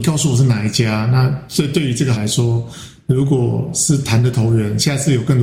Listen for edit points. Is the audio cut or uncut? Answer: cut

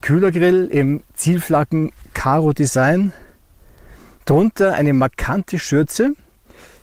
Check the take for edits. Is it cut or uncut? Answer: uncut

